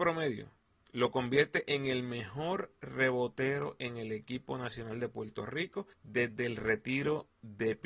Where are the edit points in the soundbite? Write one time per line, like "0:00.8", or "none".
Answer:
0:05.9